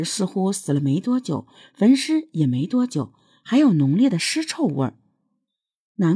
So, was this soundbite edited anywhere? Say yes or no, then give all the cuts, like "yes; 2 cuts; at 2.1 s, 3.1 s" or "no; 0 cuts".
no; 0 cuts